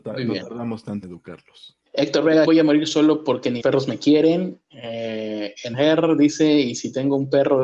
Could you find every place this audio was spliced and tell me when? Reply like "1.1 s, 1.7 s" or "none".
1.0 s, 1.9 s, 2.5 s, 3.6 s, 5.7 s